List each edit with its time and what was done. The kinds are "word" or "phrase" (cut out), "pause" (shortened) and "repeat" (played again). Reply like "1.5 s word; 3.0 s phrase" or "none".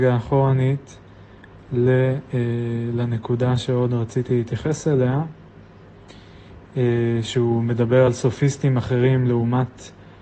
none